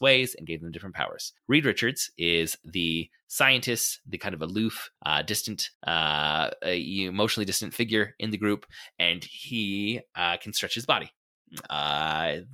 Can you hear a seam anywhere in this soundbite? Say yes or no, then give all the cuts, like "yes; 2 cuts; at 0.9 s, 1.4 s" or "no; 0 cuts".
yes; 3 cuts; at 1.4 s, 5.0 s, 5.7 s